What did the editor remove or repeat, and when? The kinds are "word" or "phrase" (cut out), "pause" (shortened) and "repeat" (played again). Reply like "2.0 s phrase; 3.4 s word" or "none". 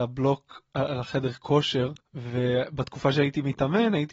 2.0 s pause